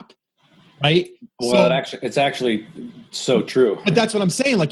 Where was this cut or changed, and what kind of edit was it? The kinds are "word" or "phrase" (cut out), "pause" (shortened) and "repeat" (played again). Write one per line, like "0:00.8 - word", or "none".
none

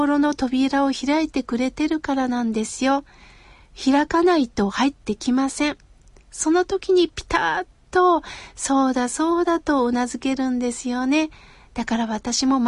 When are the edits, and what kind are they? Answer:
none

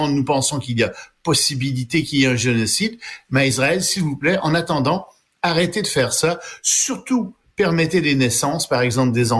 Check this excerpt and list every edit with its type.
none

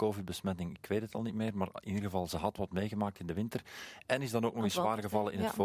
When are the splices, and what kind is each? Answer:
none

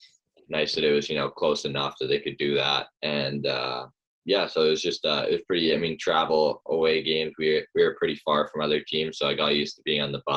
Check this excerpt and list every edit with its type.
0:02.9 - pause

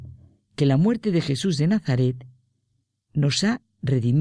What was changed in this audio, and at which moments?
none

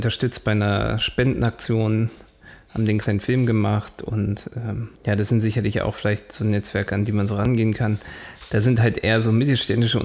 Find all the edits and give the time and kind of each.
0:05.0 - pause

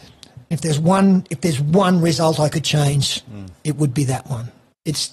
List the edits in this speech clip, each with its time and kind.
none

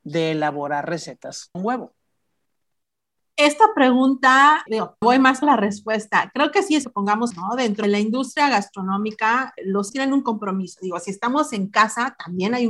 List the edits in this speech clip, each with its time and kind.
0:01.5 - word
0:04.7 - word
0:05.0 - word
0:05.4 - word
0:06.8 - word
0:07.3 - word
0:07.8 - word
0:09.6 - word
0:09.9 - word

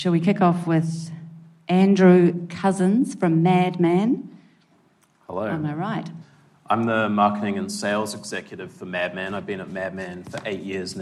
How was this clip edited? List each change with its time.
none

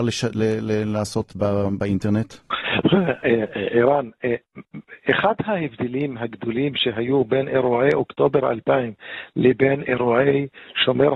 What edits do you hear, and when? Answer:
0:02.4 - pause

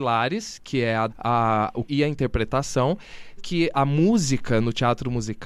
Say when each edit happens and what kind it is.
0:01.1 - word
0:01.9 - word
0:03.4 - word
0:03.7 - word

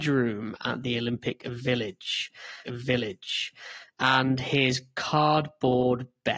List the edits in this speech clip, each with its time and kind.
0:02.6 - repeat

